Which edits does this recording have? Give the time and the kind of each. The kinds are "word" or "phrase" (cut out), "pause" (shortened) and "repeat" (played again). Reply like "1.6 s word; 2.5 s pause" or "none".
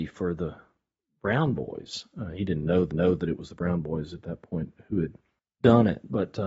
2.9 s repeat; 5.4 s pause